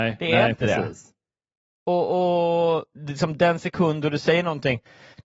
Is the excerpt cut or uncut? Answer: uncut